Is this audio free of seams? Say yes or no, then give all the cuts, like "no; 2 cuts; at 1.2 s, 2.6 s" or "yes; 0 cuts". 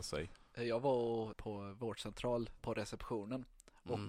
no; 2 cuts; at 1.3 s, 2.6 s